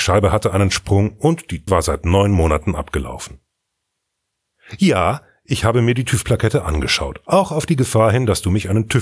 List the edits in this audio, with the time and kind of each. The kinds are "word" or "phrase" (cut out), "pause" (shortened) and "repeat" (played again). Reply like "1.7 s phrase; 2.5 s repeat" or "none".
1.7 s word